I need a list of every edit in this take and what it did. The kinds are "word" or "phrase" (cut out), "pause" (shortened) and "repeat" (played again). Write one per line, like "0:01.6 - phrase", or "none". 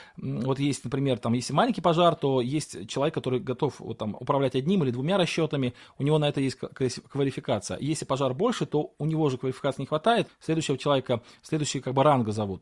0:10.3 - word